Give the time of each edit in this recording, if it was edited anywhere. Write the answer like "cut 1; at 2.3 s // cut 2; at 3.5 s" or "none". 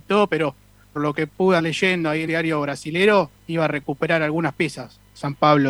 cut 1; at 0.9 s // cut 2; at 1.6 s // cut 3; at 2.3 s // cut 4; at 3.4 s